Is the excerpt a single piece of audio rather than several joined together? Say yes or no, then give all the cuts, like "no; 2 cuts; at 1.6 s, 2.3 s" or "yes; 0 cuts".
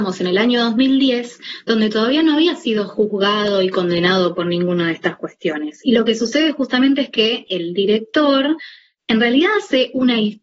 yes; 0 cuts